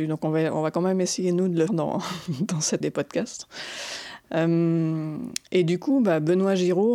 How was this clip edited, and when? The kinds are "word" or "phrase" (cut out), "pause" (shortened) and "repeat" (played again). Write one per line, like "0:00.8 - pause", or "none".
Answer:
0:01.7 - word
0:02.8 - word